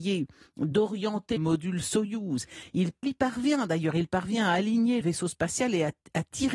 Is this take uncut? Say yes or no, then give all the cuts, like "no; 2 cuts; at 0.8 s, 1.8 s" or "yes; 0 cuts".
no; 3 cuts; at 1.4 s, 3.0 s, 5.0 s